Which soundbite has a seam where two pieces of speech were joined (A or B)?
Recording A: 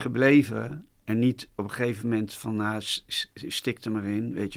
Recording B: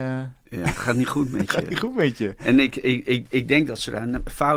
A